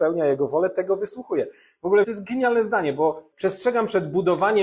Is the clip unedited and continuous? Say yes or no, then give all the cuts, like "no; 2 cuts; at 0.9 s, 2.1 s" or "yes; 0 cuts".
no; 2 cuts; at 2.0 s, 3.3 s